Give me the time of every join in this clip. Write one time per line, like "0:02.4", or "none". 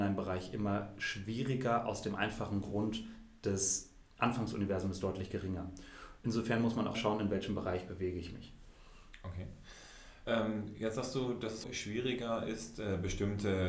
0:06.9
0:11.6